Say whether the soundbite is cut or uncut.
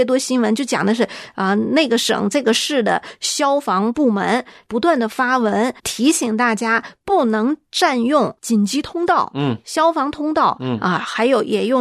cut